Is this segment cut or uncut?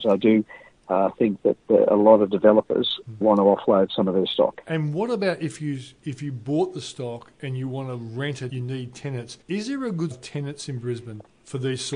cut